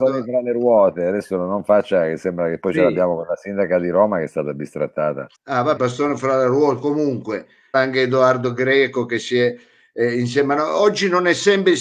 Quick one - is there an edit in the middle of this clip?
yes; 3 cuts; at 5.3 s, 5.8 s, 7.7 s

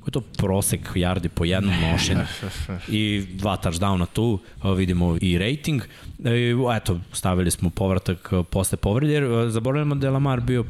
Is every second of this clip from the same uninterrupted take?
no; 1 cut; at 5.2 s

